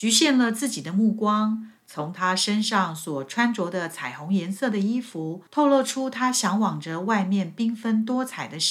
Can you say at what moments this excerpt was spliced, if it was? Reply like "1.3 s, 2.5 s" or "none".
5.5 s